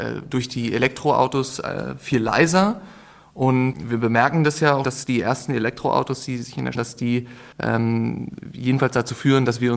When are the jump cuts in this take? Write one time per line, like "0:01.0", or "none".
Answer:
0:03.7
0:04.8
0:06.7
0:07.5